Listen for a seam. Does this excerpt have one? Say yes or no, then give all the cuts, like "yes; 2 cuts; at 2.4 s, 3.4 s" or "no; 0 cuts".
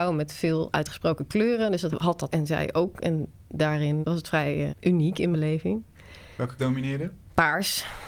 yes; 6 cuts; at 1.9 s, 2.3 s, 4.0 s, 4.7 s, 5.3 s, 6.6 s